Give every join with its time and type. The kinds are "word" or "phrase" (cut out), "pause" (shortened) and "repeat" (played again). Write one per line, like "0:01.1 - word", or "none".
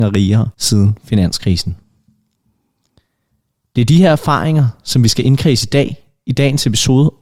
none